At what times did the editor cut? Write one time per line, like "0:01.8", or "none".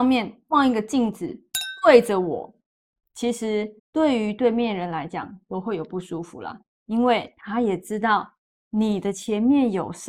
0:03.8